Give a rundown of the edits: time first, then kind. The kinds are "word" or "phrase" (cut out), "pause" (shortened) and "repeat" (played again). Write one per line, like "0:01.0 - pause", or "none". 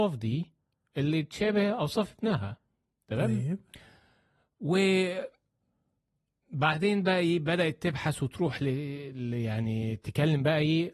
none